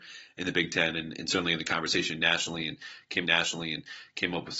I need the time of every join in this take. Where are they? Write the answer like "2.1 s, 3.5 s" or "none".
3.2 s

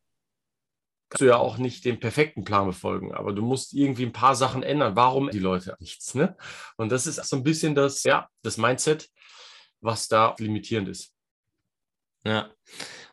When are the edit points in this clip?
1.1 s, 5.3 s, 5.8 s, 7.2 s, 8.0 s, 10.4 s

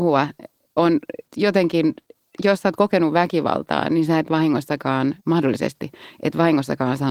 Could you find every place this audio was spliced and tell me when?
5.2 s

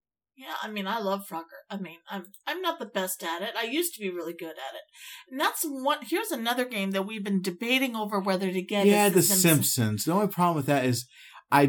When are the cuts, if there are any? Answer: none

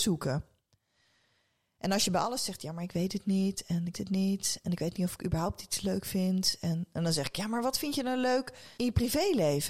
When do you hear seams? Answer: 3.9 s, 8.7 s

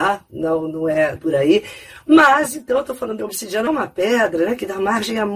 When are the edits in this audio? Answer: 1.2 s, 3.2 s, 3.7 s

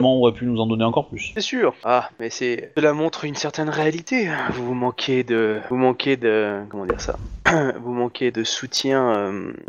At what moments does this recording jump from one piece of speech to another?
8.3 s

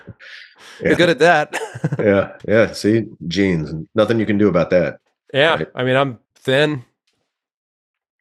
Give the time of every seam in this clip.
1.0 s, 2.4 s, 5.1 s, 6.3 s

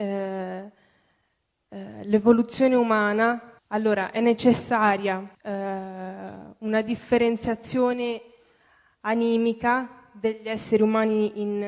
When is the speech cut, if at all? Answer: 3.6 s, 5.3 s

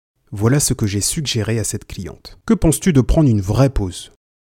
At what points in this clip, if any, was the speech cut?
2.4 s

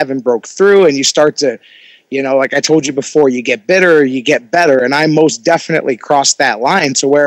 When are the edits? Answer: none

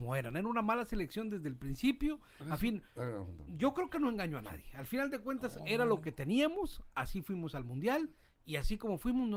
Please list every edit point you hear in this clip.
none

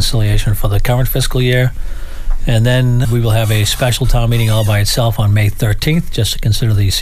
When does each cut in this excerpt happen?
3.0 s

